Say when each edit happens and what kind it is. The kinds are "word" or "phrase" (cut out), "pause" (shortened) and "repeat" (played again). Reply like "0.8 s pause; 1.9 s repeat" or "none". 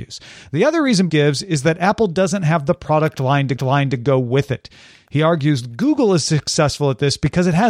1.1 s word; 3.6 s repeat